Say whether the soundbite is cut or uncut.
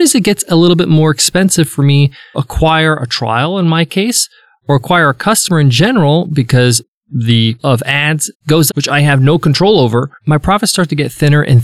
cut